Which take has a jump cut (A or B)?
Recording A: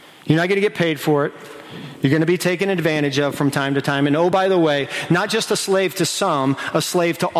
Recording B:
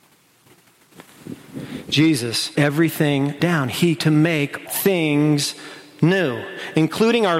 B